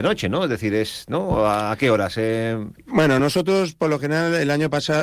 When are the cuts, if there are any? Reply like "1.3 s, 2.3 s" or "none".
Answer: none